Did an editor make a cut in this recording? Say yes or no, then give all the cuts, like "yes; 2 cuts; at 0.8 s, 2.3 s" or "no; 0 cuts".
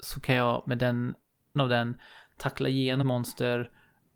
yes; 2 cuts; at 1.6 s, 3.0 s